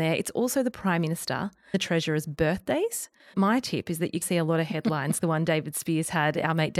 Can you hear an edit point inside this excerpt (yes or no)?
yes